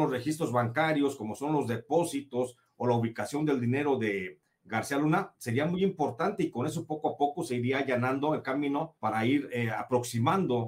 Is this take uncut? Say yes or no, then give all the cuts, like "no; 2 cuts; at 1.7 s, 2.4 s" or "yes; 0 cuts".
no; 1 cut; at 9.0 s